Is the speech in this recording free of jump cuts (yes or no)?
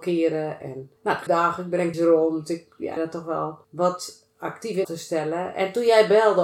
no